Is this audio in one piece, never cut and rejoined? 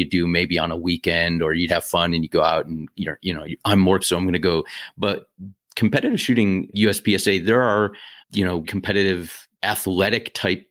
no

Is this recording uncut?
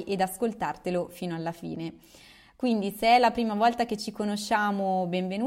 yes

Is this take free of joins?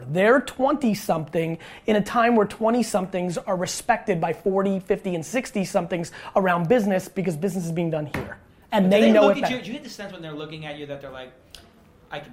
yes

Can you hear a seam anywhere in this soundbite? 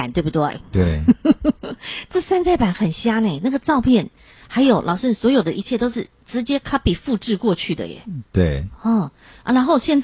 no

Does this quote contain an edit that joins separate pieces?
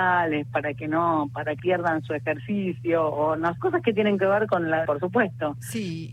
yes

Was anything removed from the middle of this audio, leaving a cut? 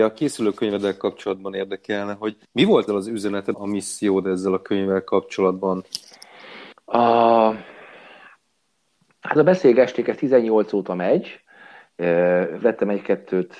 yes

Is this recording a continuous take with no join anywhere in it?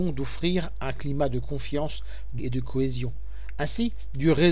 no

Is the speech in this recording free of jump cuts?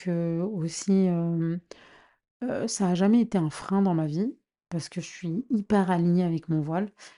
yes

